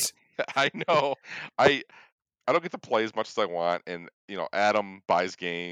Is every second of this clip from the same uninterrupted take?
yes; 0 cuts

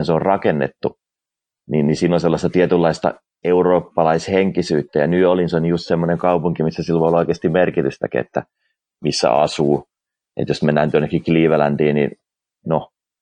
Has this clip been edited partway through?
no; 0 cuts

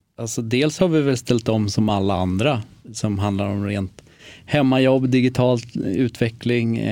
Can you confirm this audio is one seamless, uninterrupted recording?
yes; 0 cuts

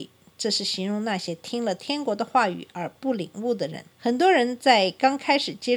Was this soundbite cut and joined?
yes; 1 cut; at 3.9 s

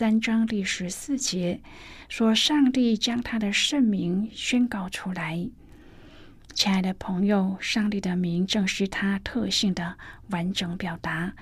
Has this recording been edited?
no; 0 cuts

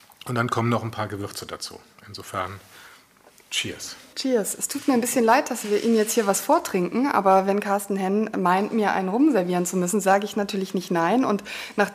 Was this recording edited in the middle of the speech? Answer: no; 0 cuts

